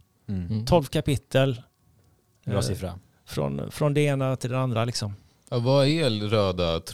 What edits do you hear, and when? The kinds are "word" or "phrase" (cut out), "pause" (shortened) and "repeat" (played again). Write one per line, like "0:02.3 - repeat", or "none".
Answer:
none